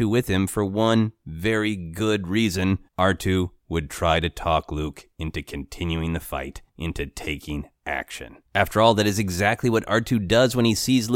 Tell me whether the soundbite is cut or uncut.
cut